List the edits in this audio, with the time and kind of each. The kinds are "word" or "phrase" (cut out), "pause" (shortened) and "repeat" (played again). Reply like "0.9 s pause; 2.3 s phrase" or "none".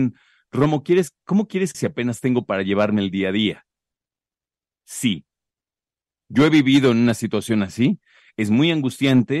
1.7 s phrase